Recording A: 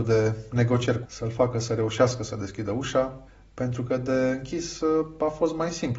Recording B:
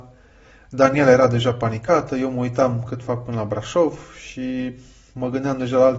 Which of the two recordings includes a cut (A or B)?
A